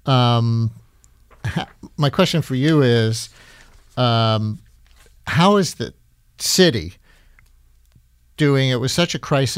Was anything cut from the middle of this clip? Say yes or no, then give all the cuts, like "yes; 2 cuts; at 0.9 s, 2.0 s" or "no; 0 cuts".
no; 0 cuts